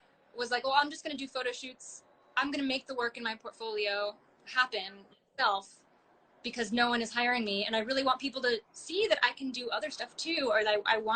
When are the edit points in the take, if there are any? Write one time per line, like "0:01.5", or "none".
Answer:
none